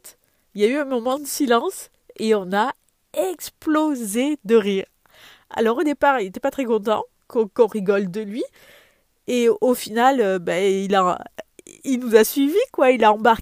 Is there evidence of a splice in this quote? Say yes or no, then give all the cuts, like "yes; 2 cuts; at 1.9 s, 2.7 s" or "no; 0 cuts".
no; 0 cuts